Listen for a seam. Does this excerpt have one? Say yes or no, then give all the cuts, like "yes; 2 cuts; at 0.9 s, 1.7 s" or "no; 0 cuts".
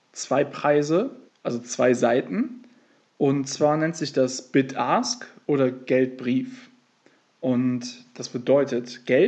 yes; 1 cut; at 1.3 s